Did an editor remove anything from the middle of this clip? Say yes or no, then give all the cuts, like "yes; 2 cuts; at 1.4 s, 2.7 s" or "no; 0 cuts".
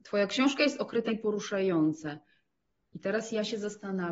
yes; 1 cut; at 1.1 s